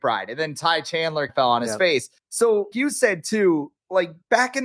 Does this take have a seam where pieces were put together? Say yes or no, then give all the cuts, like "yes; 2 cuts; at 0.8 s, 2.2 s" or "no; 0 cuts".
yes; 2 cuts; at 1.3 s, 2.7 s